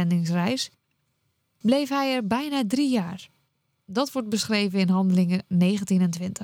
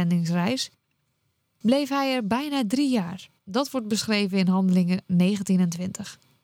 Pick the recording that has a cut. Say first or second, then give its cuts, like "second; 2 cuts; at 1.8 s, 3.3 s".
second; 1 cut; at 3.4 s